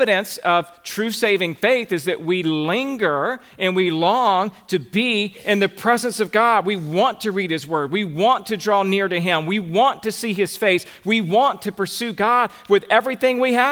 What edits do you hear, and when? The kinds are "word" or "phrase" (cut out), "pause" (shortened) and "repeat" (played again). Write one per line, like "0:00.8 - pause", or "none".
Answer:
none